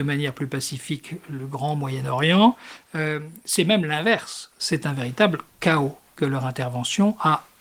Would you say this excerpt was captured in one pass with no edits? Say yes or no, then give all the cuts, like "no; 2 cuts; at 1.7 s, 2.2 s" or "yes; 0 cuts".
yes; 0 cuts